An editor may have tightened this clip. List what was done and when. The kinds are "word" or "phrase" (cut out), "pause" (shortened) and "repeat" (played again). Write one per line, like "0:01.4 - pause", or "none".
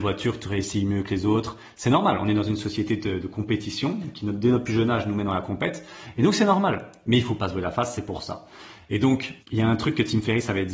0:09.4 - pause